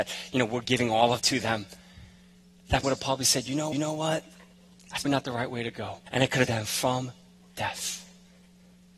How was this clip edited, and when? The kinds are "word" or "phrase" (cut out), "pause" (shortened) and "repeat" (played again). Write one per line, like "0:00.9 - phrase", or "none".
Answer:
0:01.2 - word
0:02.8 - word
0:03.7 - repeat
0:05.0 - word
0:06.1 - pause
0:06.4 - word